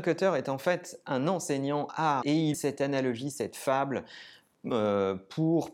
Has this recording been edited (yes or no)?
yes